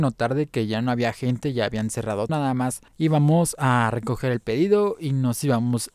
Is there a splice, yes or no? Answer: yes